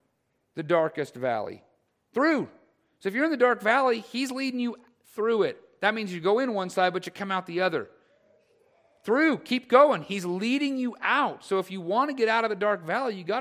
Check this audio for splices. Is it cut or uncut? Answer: uncut